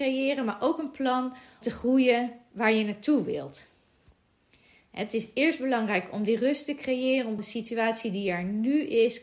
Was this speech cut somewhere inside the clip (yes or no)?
yes